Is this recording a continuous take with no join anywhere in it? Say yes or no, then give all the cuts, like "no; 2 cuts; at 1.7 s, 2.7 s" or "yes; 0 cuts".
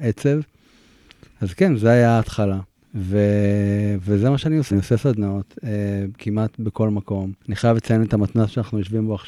no; 3 cuts; at 2.7 s, 4.7 s, 7.4 s